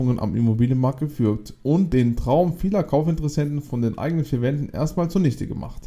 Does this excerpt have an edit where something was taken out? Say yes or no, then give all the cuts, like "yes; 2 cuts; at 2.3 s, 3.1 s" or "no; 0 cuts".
no; 0 cuts